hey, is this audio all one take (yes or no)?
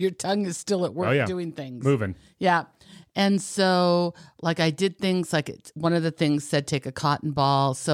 yes